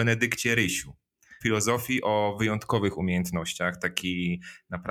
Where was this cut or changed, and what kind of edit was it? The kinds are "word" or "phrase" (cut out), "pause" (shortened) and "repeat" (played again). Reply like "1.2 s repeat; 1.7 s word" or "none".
1.4 s phrase